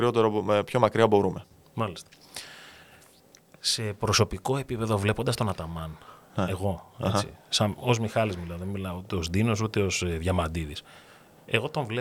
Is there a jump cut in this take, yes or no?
no